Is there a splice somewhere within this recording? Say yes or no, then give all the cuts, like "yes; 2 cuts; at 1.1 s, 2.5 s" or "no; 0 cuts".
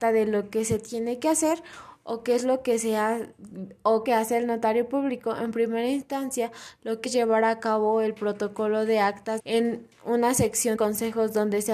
yes; 4 cuts; at 4.1 s, 7.1 s, 9.4 s, 10.8 s